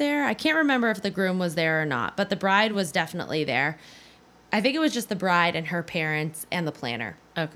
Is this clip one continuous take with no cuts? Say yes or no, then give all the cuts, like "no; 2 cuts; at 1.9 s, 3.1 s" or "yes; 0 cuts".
yes; 0 cuts